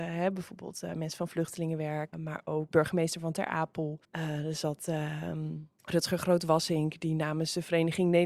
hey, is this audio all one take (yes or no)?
no